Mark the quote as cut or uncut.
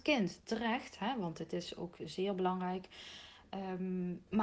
uncut